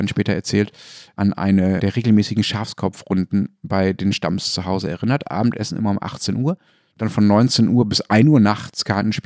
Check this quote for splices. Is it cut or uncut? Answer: uncut